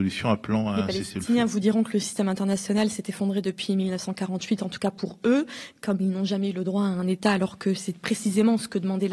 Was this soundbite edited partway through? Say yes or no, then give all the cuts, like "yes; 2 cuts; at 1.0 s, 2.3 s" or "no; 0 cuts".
no; 0 cuts